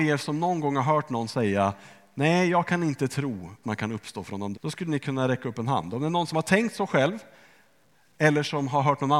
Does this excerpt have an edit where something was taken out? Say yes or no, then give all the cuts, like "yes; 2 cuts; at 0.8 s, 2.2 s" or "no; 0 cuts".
yes; 2 cuts; at 3.6 s, 4.5 s